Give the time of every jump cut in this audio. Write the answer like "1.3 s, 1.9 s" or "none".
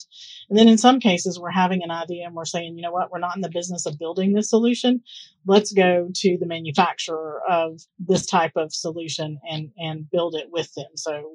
7.9 s